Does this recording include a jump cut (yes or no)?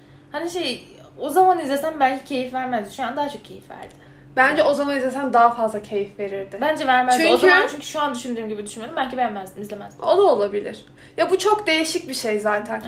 no